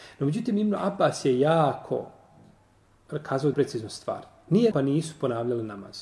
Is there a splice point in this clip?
yes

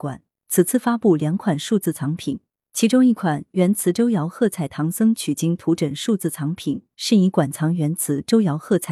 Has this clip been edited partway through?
no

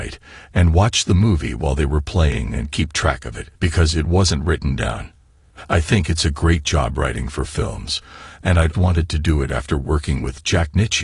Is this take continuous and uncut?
no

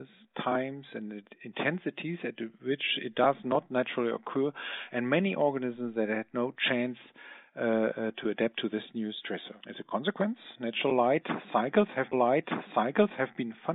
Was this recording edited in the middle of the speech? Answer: yes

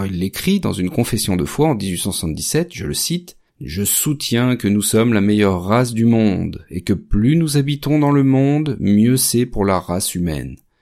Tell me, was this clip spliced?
yes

